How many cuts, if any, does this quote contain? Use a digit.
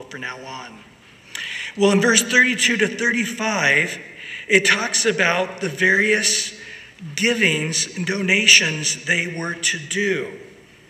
0